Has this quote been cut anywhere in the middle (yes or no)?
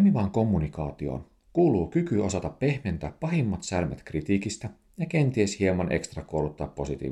no